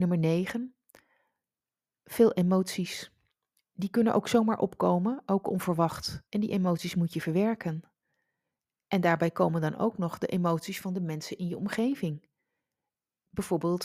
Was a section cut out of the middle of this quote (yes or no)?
yes